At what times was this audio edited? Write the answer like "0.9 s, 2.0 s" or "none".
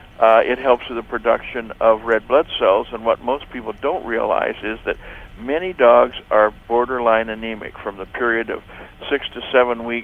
none